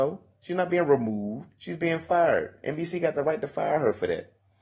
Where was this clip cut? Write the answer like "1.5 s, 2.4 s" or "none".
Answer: none